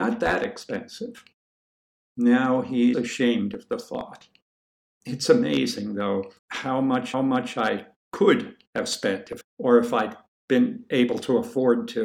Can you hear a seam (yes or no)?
yes